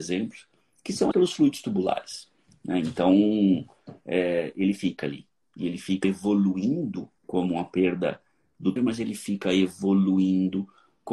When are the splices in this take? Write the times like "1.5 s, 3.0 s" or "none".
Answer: 1.1 s, 6.0 s, 7.2 s, 8.8 s